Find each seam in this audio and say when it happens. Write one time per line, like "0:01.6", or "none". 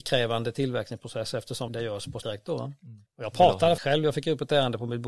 0:01.7
0:02.2
0:03.1
0:03.8